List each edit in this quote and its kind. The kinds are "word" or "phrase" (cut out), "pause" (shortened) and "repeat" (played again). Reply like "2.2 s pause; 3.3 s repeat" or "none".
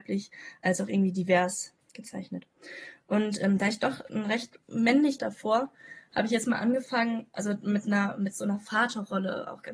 1.8 s pause; 5.2 s phrase